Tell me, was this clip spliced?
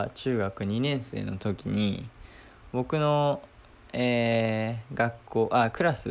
yes; 1 cut; at 3.5 s

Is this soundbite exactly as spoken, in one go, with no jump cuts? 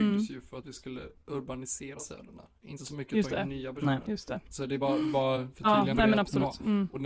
yes; 0 cuts

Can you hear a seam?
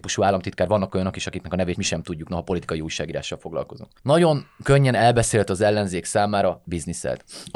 yes; 3 cuts; at 1.7 s, 4.0 s, 6.6 s

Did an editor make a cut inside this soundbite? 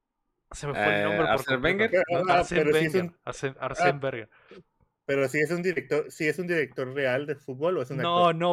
no; 0 cuts

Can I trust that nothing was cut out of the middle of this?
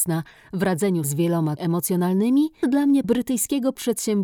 no; 4 cuts; at 1.0 s, 1.6 s, 2.6 s, 3.0 s

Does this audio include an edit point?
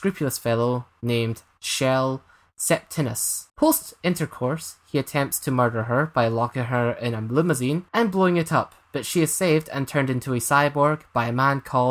yes; 2 cuts; at 3.5 s, 7.9 s

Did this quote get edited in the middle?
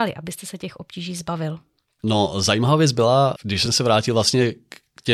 no; 0 cuts

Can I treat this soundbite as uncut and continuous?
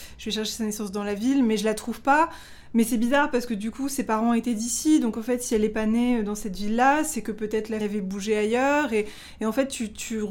no; 1 cut; at 7.8 s

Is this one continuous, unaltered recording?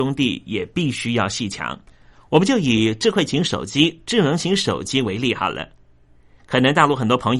yes; 0 cuts

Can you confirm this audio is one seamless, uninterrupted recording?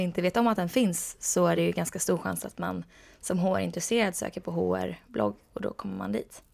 yes; 0 cuts

